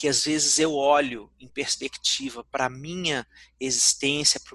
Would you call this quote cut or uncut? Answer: uncut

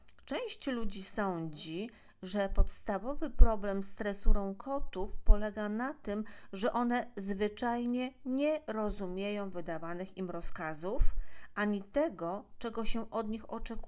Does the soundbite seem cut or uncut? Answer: uncut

